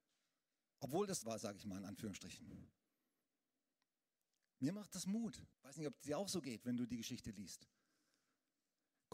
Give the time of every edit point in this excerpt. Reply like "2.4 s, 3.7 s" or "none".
1.2 s, 5.5 s